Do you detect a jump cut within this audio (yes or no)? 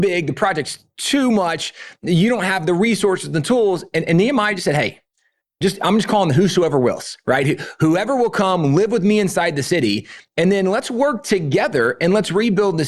no